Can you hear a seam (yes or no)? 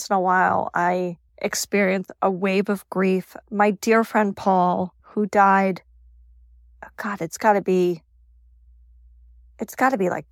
yes